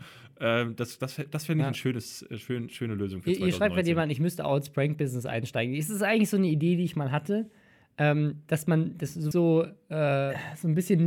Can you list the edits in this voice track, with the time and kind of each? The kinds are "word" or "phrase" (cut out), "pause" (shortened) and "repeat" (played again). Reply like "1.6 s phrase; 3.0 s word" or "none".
9.3 s word